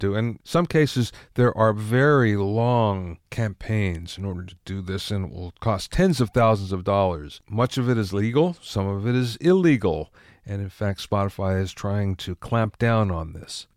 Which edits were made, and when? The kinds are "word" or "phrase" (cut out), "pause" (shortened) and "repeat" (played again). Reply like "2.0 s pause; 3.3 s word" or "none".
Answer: none